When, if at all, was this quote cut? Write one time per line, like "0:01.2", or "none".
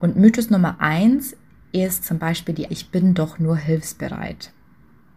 0:02.7